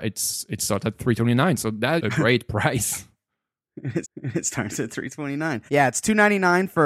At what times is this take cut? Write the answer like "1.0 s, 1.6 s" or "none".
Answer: 2.0 s, 4.0 s, 5.7 s